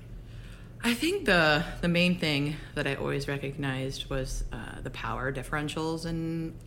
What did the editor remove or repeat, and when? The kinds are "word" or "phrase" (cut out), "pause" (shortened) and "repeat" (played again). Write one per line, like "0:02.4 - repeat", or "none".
none